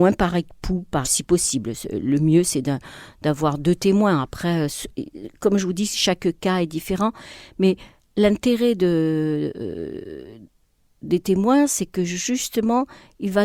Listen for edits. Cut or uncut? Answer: cut